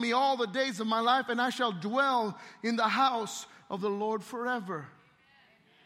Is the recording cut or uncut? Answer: uncut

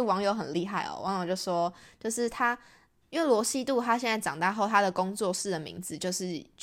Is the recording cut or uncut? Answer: uncut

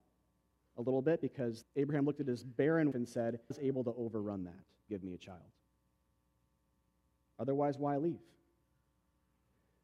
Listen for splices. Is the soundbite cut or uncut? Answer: cut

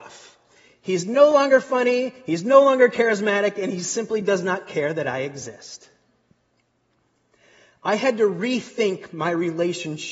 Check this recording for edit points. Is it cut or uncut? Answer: uncut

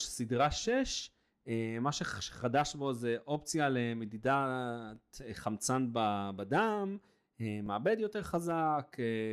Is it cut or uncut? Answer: uncut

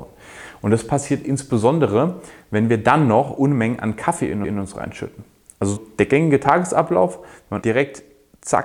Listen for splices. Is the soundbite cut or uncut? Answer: cut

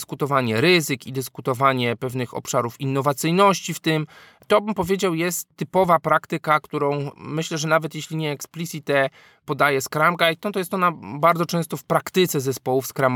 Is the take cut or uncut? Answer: uncut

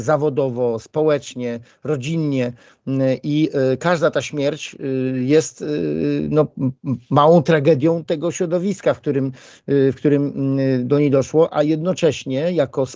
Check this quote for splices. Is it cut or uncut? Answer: uncut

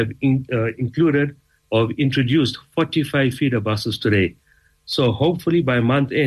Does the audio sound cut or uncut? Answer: uncut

